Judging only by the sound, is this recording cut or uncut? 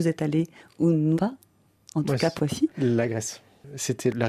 cut